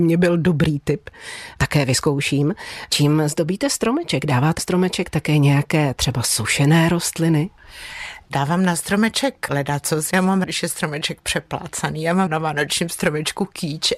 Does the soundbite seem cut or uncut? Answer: cut